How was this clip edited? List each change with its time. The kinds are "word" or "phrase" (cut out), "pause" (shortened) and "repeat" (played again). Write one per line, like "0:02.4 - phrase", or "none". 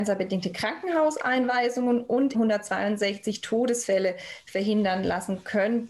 0:02.3 - word